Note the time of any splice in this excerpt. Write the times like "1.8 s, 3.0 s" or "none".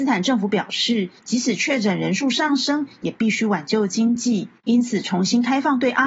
1.2 s, 4.6 s